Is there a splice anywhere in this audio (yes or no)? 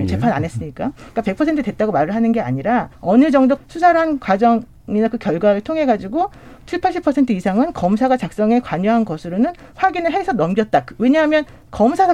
yes